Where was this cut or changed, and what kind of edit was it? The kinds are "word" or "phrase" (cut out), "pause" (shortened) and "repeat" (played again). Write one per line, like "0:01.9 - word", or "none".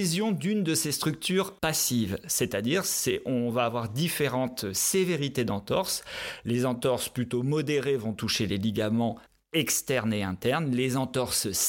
0:01.6 - pause
0:09.3 - pause